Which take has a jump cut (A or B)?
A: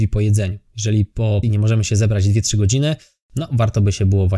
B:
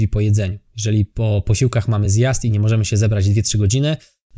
A